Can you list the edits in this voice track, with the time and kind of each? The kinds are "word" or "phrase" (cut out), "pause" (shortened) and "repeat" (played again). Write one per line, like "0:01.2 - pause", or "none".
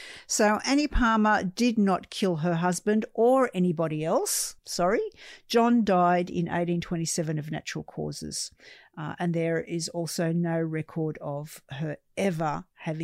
0:04.6 - pause